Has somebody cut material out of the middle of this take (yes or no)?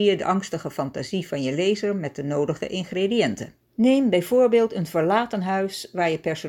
yes